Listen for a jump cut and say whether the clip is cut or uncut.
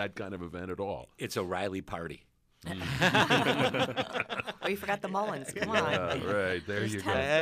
uncut